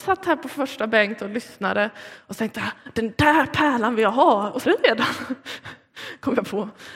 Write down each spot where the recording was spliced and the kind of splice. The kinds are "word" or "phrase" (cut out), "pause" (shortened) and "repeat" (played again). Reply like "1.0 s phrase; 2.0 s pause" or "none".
4.6 s phrase